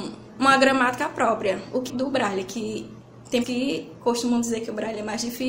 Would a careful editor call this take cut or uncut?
cut